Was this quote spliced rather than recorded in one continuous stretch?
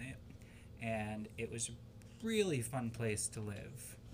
no; 0 cuts

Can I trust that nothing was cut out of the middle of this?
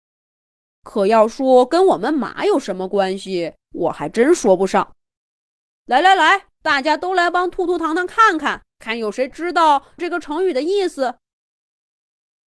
no; 4 cuts; at 3.6 s, 5.1 s, 6.6 s, 8.7 s

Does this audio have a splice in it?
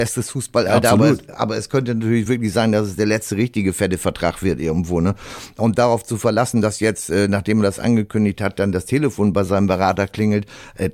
no; 0 cuts

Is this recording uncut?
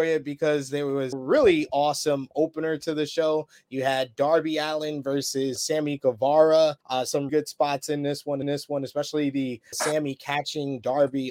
no; 6 cuts; at 1.1 s, 5.6 s, 6.8 s, 7.3 s, 8.4 s, 9.7 s

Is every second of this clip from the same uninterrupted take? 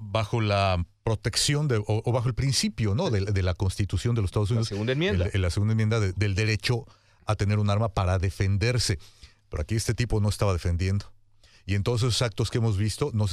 yes; 0 cuts

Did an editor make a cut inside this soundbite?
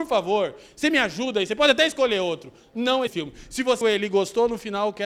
yes; 2 cuts; at 3.1 s, 3.8 s

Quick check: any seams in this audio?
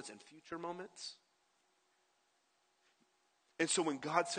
no; 0 cuts

